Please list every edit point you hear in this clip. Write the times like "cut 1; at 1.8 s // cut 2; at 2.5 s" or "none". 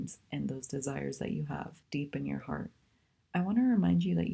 cut 1; at 1.8 s